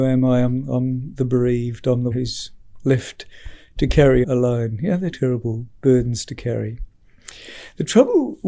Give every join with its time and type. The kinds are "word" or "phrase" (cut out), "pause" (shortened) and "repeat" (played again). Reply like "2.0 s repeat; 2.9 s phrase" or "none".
2.1 s word; 4.2 s word; 5.1 s word